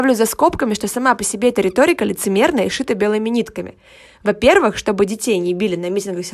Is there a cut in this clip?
no; 0 cuts

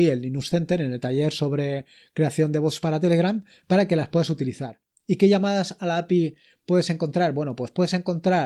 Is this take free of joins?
yes; 0 cuts

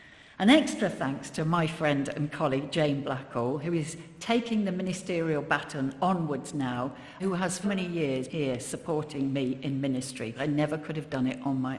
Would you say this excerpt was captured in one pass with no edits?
no; 4 cuts; at 7.2 s, 7.6 s, 8.3 s, 10.3 s

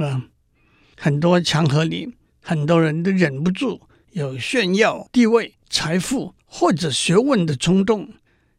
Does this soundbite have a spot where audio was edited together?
yes; 1 cut; at 5.6 s

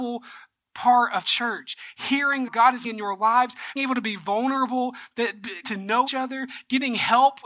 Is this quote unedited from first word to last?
no; 6 cuts; at 1.2 s, 2.5 s, 2.8 s, 3.8 s, 5.6 s, 6.1 s

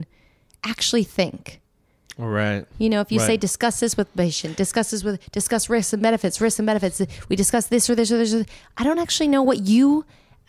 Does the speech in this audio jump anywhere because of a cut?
no; 0 cuts

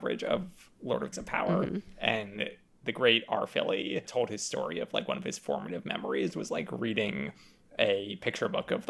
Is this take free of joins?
no; 1 cut; at 1.1 s

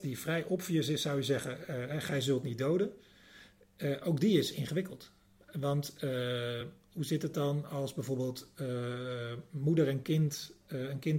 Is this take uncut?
yes; 0 cuts

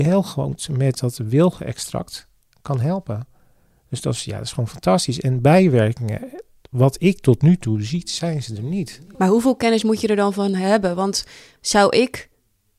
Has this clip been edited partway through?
no; 0 cuts

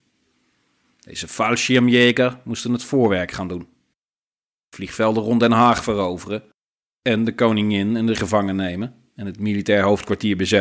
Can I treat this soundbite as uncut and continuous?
no; 1 cut; at 8.1 s

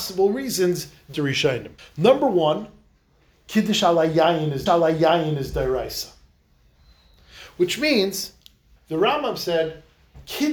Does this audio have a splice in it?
yes; 4 cuts; at 1.1 s, 1.8 s, 4.7 s, 8.8 s

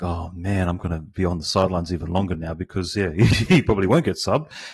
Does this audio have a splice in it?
no; 0 cuts

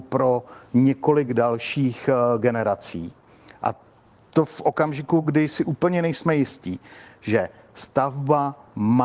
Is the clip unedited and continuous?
yes; 0 cuts

